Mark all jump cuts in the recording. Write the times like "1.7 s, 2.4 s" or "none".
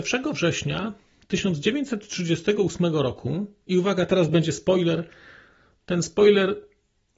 none